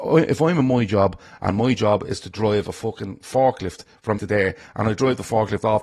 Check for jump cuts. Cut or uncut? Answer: cut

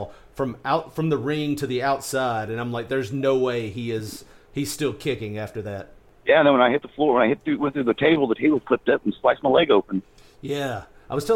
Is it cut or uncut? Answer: uncut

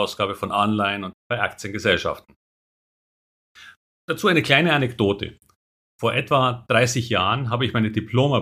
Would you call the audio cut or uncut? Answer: cut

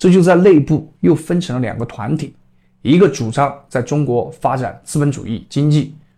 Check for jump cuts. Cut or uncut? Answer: uncut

